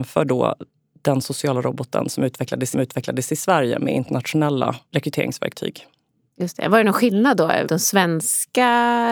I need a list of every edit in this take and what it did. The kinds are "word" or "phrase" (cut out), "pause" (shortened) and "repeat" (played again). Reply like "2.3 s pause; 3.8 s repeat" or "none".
2.7 s repeat; 7.7 s word